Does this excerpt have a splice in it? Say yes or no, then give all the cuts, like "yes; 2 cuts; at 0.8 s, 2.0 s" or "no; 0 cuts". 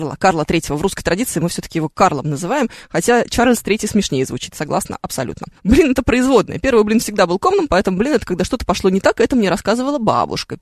yes; 1 cut; at 5.6 s